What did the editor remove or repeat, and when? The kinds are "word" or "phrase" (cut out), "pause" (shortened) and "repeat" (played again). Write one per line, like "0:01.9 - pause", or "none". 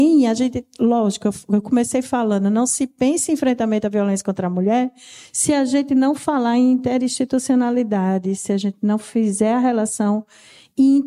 none